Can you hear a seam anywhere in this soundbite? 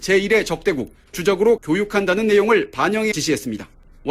yes; 3 cuts; at 1.1 s, 1.6 s, 3.1 s

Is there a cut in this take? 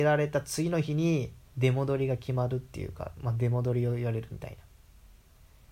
yes; 1 cut; at 1.5 s

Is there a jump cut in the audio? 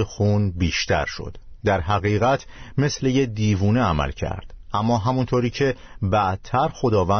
no; 0 cuts

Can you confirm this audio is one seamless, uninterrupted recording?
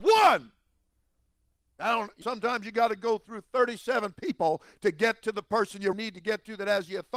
no; 2 cuts; at 2.2 s, 5.9 s

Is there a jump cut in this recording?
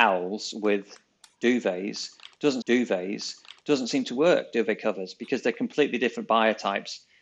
yes; 1 cut; at 2.6 s

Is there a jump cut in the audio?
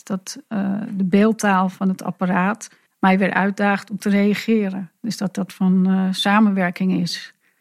yes; 3 cuts; at 2.9 s, 5.0 s, 5.5 s

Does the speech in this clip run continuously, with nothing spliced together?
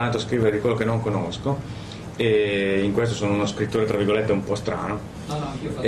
yes; 0 cuts

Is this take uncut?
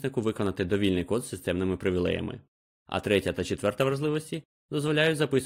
yes; 0 cuts

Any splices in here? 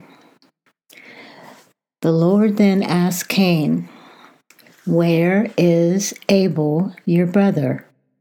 no; 0 cuts

